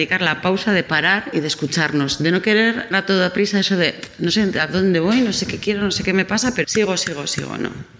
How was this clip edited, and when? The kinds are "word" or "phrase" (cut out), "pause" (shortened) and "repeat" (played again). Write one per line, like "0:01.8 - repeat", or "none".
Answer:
0:02.9 - word
0:06.6 - word